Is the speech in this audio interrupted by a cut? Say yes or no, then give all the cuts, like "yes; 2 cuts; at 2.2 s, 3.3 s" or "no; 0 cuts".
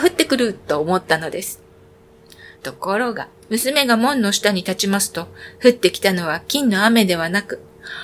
yes; 2 cuts; at 2.6 s, 3.4 s